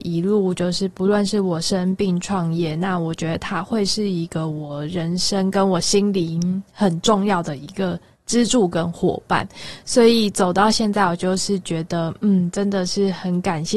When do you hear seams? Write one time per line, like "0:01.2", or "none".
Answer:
none